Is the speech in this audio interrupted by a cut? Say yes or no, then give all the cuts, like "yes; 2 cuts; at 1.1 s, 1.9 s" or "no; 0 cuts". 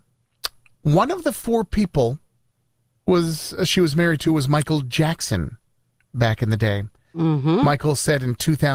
no; 0 cuts